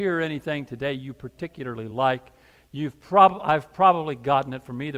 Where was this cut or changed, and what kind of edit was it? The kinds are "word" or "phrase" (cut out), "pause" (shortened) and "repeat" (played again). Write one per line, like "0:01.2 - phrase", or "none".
none